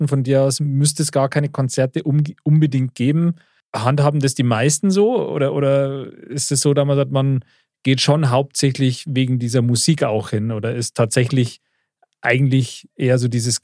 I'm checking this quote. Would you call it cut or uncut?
uncut